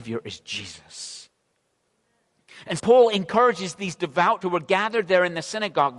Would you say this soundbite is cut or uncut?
cut